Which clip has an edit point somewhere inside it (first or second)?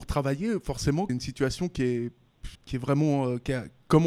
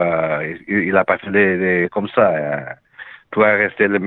first